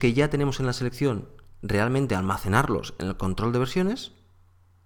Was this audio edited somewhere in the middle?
no; 0 cuts

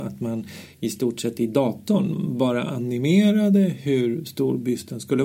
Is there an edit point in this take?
no; 0 cuts

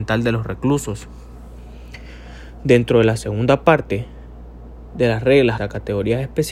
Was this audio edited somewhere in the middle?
yes; 1 cut; at 5.6 s

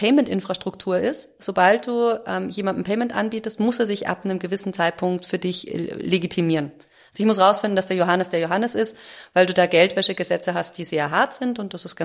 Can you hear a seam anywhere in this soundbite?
no; 0 cuts

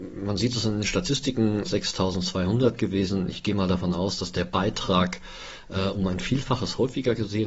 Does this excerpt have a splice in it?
yes; 1 cut; at 1.6 s

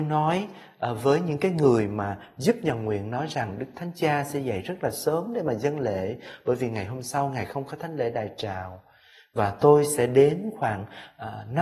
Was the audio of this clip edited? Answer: no; 0 cuts

